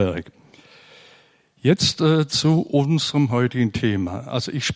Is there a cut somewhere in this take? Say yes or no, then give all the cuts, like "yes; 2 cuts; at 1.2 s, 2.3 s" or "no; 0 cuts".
no; 0 cuts